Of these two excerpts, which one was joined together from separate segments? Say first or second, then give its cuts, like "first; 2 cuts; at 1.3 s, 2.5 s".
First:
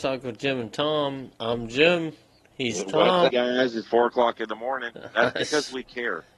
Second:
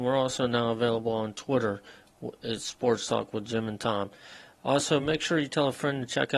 first; 3 cuts; at 1.3 s, 3.3 s, 3.8 s